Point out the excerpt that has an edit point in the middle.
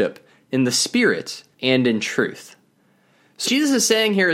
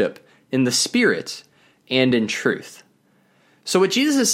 first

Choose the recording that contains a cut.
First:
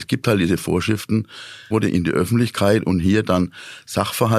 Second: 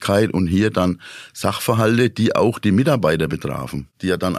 first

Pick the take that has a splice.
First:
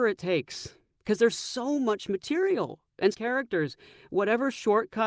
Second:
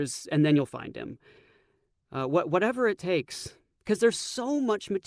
first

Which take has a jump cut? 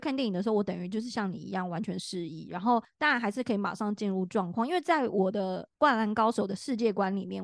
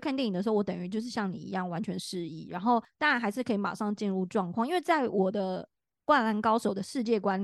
first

